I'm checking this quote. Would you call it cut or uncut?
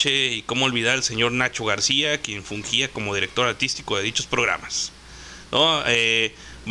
uncut